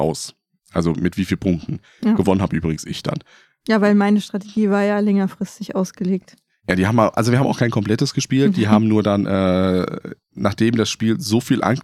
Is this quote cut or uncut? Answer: uncut